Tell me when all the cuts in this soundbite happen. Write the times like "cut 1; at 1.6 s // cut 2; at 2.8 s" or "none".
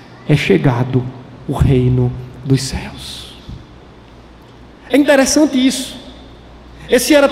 none